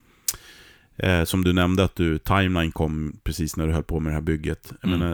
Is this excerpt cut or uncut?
uncut